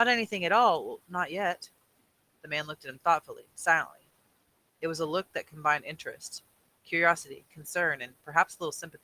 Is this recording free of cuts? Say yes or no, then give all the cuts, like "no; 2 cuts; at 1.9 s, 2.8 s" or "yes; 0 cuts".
yes; 0 cuts